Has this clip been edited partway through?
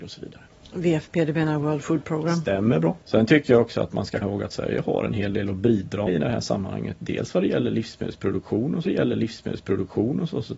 yes; 4 cuts; at 3.0 s, 4.2 s, 6.1 s, 8.9 s

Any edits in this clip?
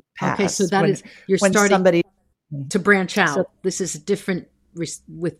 no; 0 cuts

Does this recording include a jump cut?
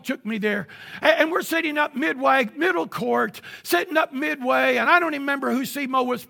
no; 0 cuts

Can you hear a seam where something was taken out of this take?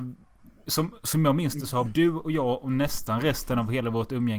yes; 1 cut; at 1.9 s

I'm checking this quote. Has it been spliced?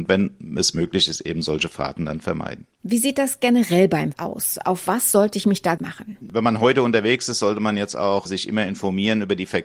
yes; 3 cuts; at 4.1 s, 5.8 s, 8.3 s

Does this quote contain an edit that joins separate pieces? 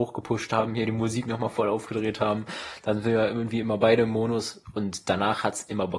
no; 0 cuts

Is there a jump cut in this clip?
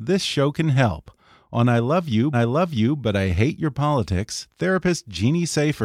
yes; 1 cut; at 2.3 s

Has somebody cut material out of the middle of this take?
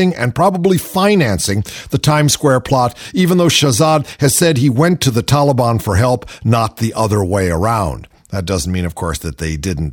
no; 0 cuts

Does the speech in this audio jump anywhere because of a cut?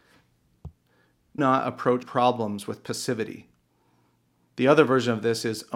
yes; 2 cuts; at 1.4 s, 2.0 s

